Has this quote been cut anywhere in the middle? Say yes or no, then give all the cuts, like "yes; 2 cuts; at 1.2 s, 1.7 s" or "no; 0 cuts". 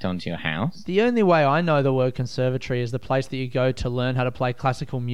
no; 0 cuts